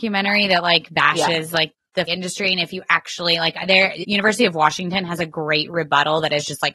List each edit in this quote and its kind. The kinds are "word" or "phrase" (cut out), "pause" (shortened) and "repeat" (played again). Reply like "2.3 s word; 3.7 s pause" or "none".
2.1 s word; 4.0 s word